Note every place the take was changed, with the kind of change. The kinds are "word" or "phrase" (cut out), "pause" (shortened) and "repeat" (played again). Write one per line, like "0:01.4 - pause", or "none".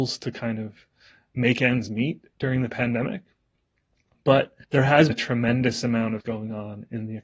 0:04.6 - pause
0:05.1 - word
0:06.2 - word